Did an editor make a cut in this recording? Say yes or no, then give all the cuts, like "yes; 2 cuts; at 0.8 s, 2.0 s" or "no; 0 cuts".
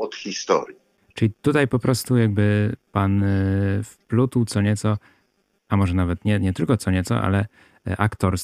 no; 0 cuts